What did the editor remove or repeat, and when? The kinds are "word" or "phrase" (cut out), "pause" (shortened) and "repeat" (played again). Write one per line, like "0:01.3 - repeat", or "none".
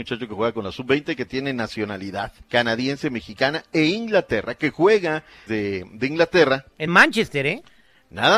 0:02.4 - pause
0:05.5 - phrase
0:06.9 - word